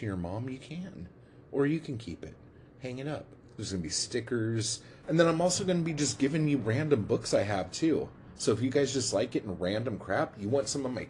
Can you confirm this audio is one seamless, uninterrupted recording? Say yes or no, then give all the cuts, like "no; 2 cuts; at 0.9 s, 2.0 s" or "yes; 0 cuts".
yes; 0 cuts